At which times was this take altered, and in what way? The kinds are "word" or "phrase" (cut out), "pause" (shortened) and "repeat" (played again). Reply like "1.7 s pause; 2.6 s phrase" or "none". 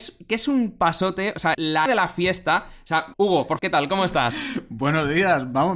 1.5 s word; 1.9 s word; 3.1 s word; 3.6 s word

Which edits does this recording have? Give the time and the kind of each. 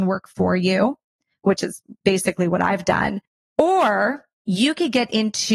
none

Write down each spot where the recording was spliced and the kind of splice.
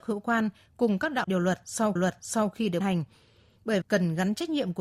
1.2 s word; 2.0 s repeat; 2.8 s word; 3.8 s word

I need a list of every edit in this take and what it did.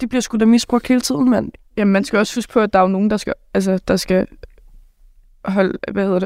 none

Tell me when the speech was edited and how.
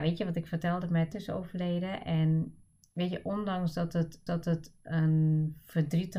1.1 s word; 4.3 s repeat

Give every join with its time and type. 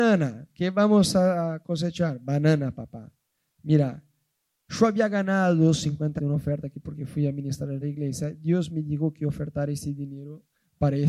6.2 s word; 7.8 s word

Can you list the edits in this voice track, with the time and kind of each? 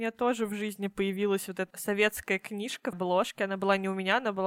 1.7 s word; 2.9 s word

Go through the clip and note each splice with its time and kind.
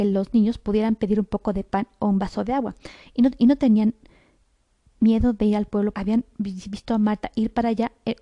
5.9 s word

